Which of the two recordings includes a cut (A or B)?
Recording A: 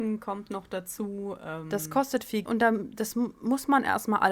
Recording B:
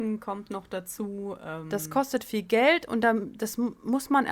A